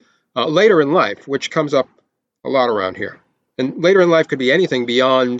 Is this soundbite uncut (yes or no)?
yes